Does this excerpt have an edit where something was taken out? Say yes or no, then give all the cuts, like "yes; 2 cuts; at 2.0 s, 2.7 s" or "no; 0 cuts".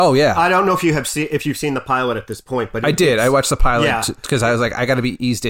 no; 0 cuts